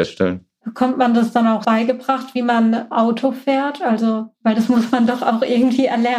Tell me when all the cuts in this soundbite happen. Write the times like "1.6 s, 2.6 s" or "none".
1.6 s, 2.9 s